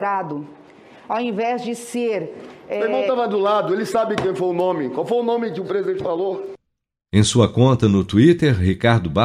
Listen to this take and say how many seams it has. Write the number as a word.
zero